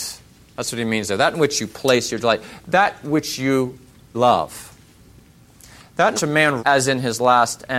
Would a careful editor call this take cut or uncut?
cut